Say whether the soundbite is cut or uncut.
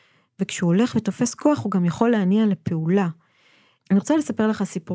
uncut